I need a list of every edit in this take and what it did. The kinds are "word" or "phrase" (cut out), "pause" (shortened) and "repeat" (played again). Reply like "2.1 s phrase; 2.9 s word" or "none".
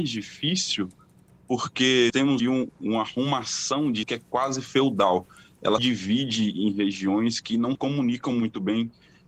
2.1 s word; 2.4 s word; 2.7 s word; 4.0 s word; 5.8 s word; 7.7 s word